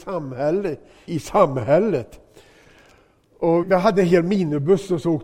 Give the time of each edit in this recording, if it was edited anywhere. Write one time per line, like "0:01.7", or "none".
0:01.1
0:03.6